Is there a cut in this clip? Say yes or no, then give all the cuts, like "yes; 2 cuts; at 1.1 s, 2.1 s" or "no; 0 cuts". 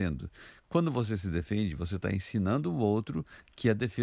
no; 0 cuts